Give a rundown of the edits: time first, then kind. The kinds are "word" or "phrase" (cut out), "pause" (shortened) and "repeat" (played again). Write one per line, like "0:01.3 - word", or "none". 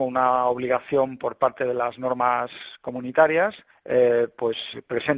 0:03.7 - pause